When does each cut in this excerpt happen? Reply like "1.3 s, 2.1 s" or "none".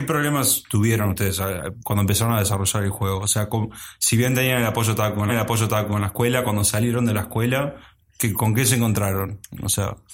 5.3 s